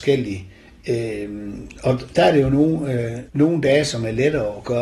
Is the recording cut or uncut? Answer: cut